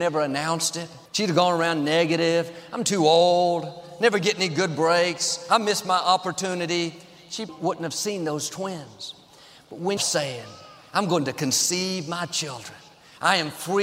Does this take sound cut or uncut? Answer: cut